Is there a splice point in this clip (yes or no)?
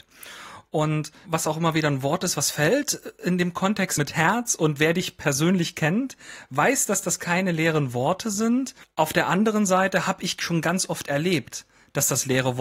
yes